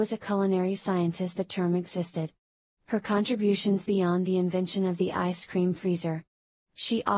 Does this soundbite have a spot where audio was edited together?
yes; 2 cuts; at 1.4 s, 3.9 s

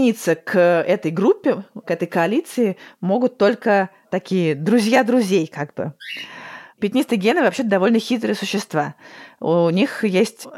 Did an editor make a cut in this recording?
no; 0 cuts

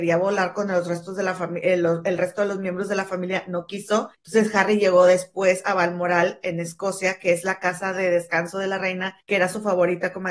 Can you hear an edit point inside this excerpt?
yes; 2 cuts; at 4.1 s, 9.2 s

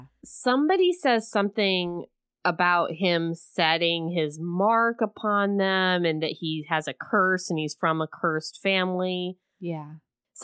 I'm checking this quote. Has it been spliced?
no; 0 cuts

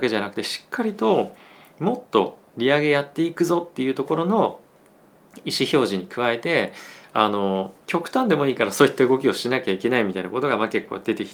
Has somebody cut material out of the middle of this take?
yes; 1 cut; at 7.8 s

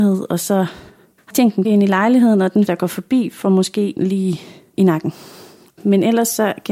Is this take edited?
yes; 4 cuts; at 1.3 s, 1.6 s, 2.7 s, 4.0 s

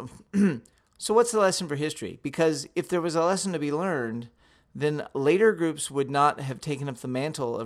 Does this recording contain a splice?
no; 0 cuts

